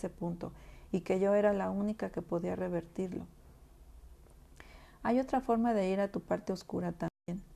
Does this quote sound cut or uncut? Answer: uncut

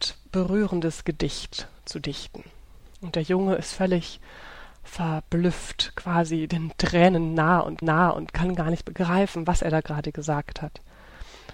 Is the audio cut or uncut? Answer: cut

